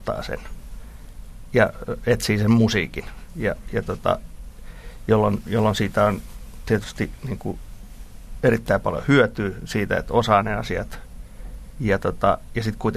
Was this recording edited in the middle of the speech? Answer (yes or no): no